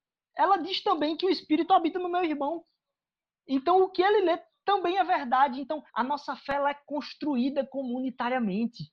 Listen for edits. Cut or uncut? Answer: cut